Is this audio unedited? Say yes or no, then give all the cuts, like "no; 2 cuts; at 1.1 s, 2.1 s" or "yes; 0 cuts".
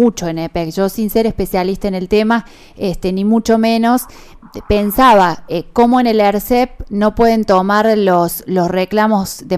yes; 0 cuts